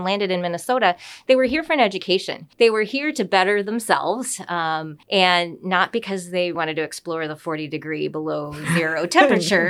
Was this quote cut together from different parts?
yes; 3 cuts; at 2.5 s, 5.0 s, 6.5 s

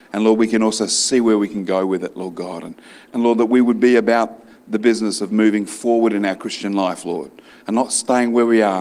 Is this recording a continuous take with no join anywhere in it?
yes; 0 cuts

